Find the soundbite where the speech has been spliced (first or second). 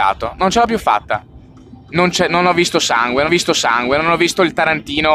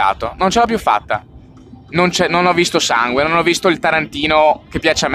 first